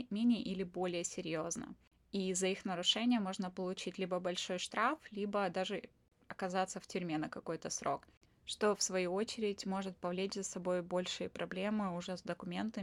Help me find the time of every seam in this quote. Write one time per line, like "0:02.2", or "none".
none